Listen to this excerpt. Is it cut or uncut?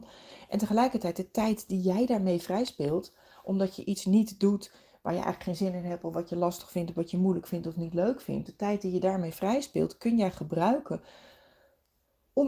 uncut